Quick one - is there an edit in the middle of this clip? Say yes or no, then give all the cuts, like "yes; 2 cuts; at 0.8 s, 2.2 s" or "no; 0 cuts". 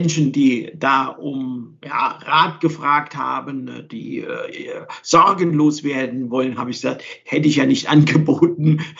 no; 0 cuts